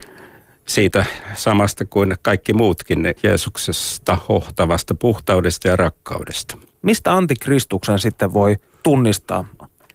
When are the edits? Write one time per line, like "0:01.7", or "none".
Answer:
0:03.2
0:06.6
0:08.7